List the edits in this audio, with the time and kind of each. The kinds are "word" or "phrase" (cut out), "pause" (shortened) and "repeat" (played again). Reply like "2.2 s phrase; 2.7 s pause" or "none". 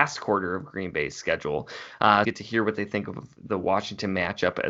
2.2 s phrase

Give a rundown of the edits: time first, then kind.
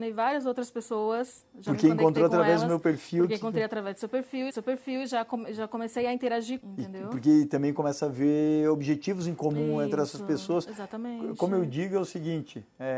4.5 s repeat; 6.6 s phrase

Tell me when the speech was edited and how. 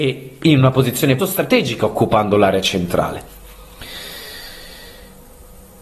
1.2 s phrase

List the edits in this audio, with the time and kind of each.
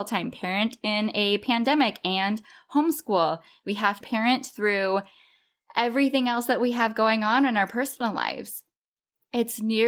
4.0 s word

